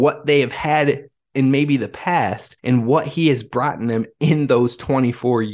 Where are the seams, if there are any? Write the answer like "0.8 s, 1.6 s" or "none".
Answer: 2.6 s